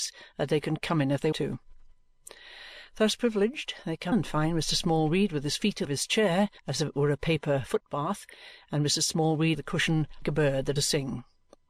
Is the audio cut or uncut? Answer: cut